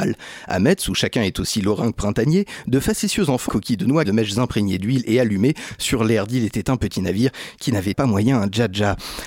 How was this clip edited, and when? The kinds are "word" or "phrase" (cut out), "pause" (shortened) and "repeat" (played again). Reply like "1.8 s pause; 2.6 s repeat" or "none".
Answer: 3.5 s phrase; 4.0 s word; 7.9 s phrase